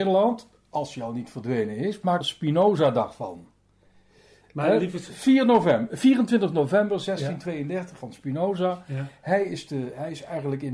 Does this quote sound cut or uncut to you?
cut